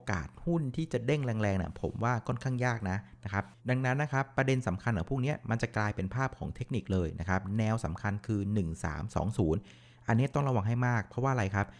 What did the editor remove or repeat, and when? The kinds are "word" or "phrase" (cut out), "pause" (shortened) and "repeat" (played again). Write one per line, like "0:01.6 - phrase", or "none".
0:03.6 - pause